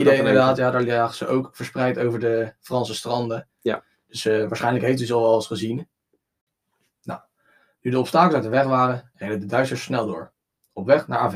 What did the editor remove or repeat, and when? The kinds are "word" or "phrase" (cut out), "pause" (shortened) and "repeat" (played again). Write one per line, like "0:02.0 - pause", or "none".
none